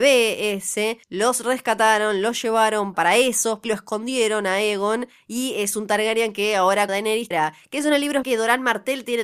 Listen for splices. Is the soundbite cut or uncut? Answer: cut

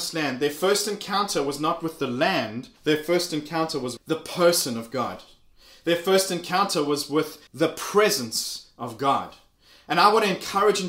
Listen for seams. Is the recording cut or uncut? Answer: cut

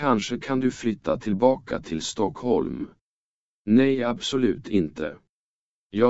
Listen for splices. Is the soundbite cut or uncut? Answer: uncut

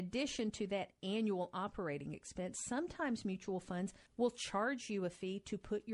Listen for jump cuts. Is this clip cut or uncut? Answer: cut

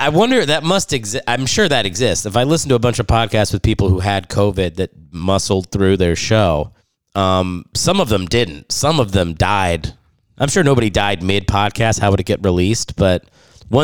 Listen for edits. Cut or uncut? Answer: cut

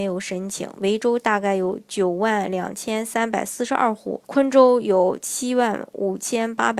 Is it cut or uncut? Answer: cut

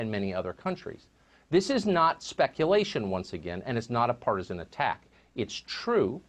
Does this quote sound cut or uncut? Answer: uncut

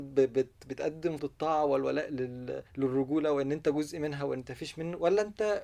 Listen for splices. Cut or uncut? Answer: cut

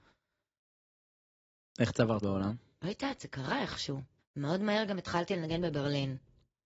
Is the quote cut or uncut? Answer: cut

